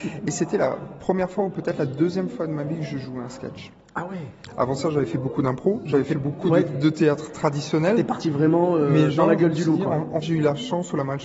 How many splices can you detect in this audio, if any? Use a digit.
1